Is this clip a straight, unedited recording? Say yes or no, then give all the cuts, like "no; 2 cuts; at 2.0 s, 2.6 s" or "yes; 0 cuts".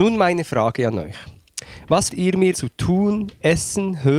no; 2 cuts; at 2.1 s, 2.5 s